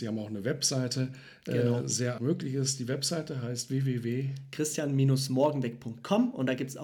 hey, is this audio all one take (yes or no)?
no